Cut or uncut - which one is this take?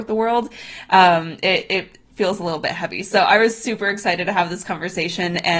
uncut